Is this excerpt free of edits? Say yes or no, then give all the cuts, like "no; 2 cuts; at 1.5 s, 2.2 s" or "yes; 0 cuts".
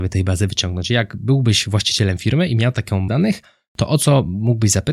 no; 1 cut; at 3.1 s